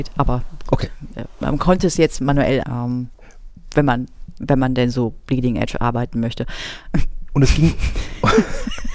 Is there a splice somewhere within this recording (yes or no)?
yes